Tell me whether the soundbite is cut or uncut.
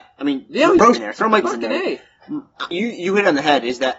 cut